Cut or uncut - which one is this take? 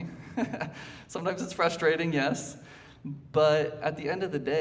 uncut